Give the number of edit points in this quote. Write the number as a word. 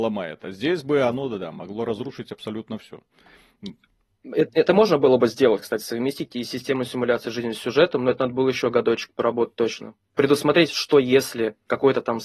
zero